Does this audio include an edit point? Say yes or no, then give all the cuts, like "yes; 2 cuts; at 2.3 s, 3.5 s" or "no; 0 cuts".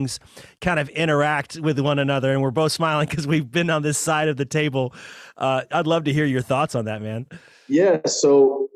no; 0 cuts